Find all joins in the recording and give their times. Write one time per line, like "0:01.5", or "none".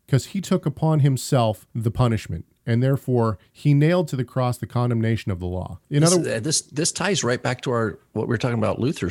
0:01.7
0:05.8

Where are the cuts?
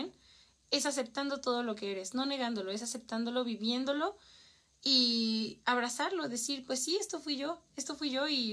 none

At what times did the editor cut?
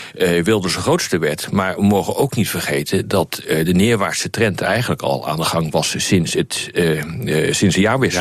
none

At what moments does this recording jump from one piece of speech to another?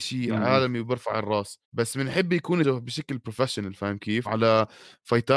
0:01.6
0:02.6
0:04.3

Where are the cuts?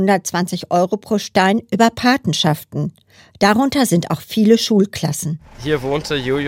none

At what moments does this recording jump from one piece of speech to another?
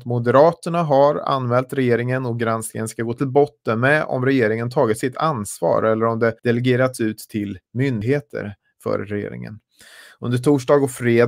0:06.4

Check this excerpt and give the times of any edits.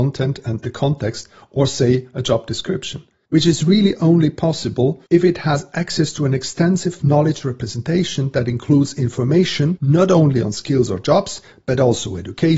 0:05.1

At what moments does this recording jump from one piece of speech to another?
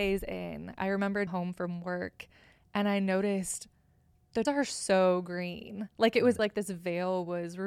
0:01.3
0:04.4
0:06.4

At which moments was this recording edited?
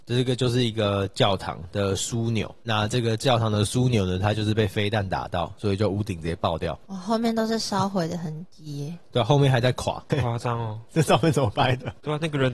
0:10.1

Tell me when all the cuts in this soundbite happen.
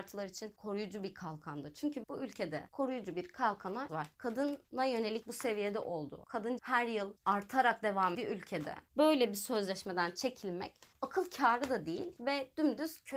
0:02.0
0:03.9
0:05.2
0:06.6
0:08.1

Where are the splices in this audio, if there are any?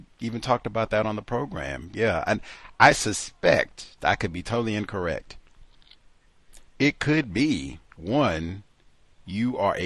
0:04.0
0:06.7
0:07.9

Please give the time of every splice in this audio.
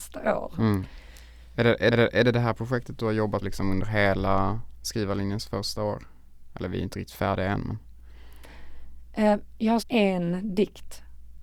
0:01.9
0:03.4
0:09.8

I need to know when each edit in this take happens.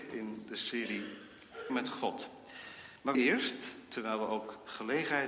0:01.7
0:03.1

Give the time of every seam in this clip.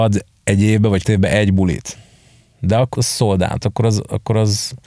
0:01.0
0:03.0
0:03.6

